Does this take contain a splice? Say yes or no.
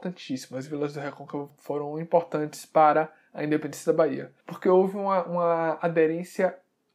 yes